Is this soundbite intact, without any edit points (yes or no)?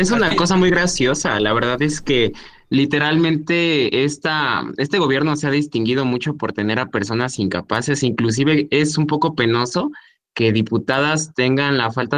yes